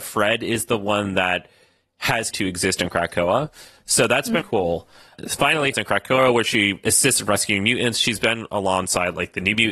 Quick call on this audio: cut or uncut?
cut